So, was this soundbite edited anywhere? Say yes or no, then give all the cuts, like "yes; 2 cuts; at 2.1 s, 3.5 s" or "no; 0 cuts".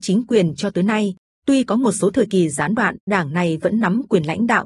yes; 1 cut; at 3.1 s